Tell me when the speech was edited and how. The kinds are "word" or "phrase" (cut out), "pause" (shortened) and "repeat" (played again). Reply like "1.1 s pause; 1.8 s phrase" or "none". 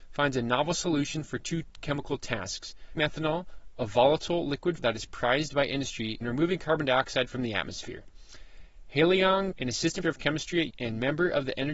3.0 s word; 4.8 s word; 6.2 s word; 9.5 s word; 10.0 s word; 10.7 s word